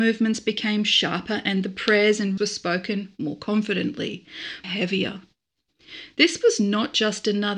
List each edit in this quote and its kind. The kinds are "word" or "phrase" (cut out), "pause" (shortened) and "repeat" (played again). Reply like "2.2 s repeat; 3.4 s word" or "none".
2.4 s word; 4.6 s phrase